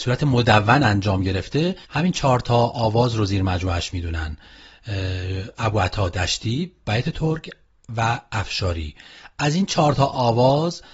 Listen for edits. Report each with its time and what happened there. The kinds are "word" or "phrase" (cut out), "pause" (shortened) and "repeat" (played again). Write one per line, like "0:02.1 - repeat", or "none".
0:01.8 - pause

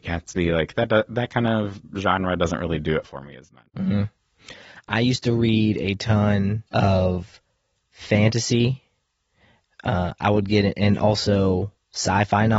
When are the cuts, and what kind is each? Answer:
0:03.7 - pause
0:06.7 - pause

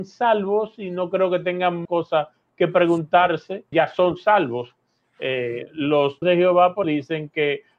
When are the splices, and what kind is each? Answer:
0:01.8 - word
0:03.7 - word
0:06.2 - word
0:06.8 - word

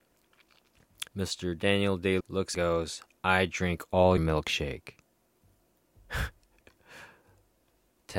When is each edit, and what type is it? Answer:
0:01.1 - pause
0:02.2 - word
0:02.5 - phrase
0:04.2 - word
0:06.4 - pause

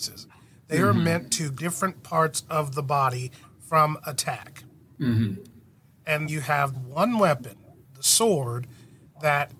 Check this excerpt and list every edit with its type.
0:01.6 - word
0:06.3 - word
0:06.7 - word

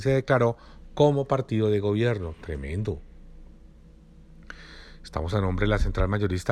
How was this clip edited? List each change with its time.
none

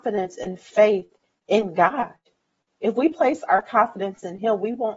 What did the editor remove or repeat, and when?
none

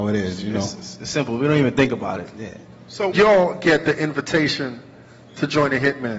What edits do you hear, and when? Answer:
0:03.1 - phrase

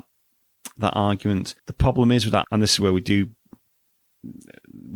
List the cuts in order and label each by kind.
0:01.6 - pause
0:02.4 - word

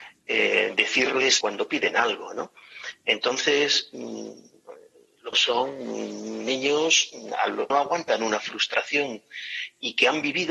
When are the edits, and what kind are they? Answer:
0:01.4 - word
0:05.3 - phrase
0:07.7 - phrase

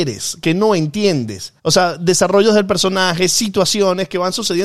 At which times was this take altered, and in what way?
0:01.6 - pause

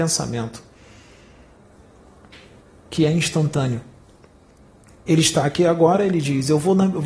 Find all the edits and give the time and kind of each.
none

